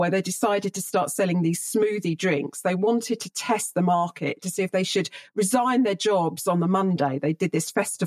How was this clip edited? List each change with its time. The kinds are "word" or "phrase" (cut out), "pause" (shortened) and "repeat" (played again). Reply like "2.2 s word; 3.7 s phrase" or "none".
none